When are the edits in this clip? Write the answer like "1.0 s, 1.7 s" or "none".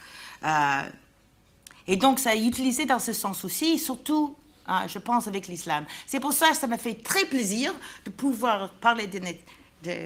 none

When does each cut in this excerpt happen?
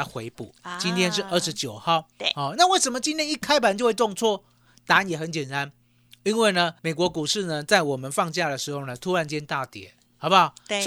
6.8 s

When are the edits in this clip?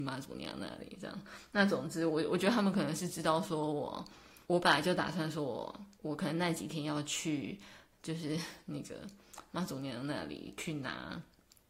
4.4 s, 5.9 s

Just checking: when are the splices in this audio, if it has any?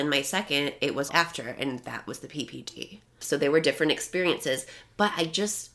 1.1 s

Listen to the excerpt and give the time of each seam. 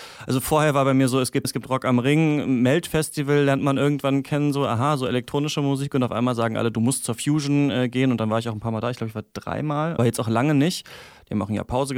1.4 s, 10.0 s

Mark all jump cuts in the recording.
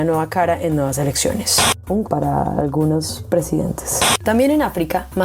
2.0 s

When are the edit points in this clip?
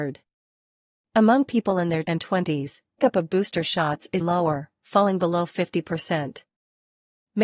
2.0 s, 3.0 s, 4.2 s

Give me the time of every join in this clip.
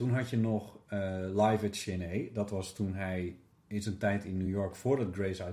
none

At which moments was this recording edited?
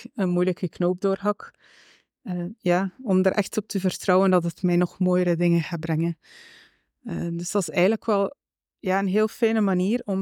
none

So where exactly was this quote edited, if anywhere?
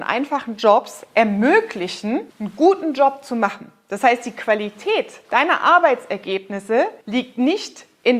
2.3 s, 5.2 s, 7.0 s

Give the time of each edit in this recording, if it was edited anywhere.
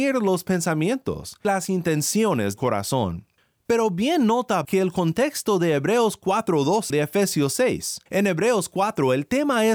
1.4 s, 2.6 s, 3.4 s, 4.6 s, 6.9 s, 8.1 s

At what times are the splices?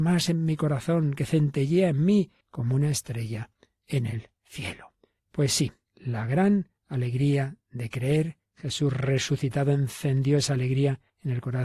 none

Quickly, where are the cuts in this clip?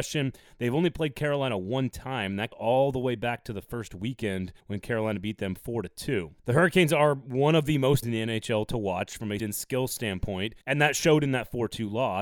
2.5 s, 4.6 s, 6.4 s, 8.0 s, 9.4 s, 10.6 s

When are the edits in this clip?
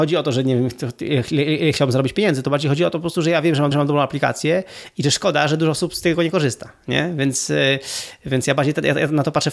3.7 s

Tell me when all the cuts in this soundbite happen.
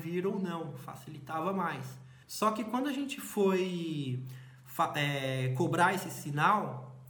2.2 s

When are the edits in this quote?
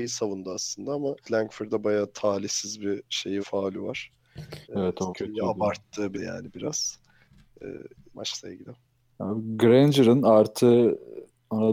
1.2 s, 3.4 s, 4.6 s, 5.1 s, 6.1 s, 8.1 s

